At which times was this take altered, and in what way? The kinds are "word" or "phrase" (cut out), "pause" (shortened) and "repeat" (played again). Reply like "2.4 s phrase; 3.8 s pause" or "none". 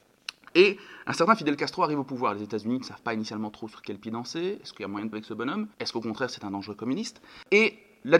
5.1 s word; 5.7 s pause